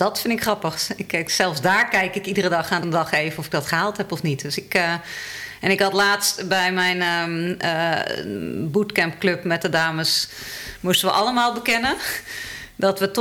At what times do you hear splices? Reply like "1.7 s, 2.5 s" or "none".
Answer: 2.8 s